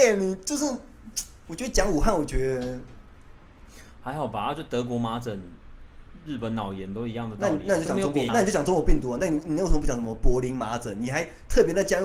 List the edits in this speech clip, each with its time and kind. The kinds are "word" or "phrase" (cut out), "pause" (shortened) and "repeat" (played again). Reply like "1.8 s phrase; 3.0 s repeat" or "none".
8.3 s phrase